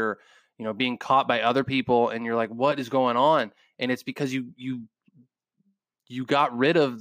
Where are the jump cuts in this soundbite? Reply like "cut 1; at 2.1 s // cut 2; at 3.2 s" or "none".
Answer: none